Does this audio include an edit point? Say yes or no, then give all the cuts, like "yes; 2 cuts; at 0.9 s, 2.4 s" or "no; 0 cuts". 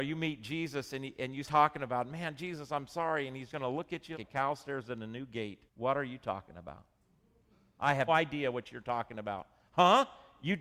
yes; 6 cuts; at 1.4 s, 3.5 s, 4.1 s, 5.7 s, 7.5 s, 8.1 s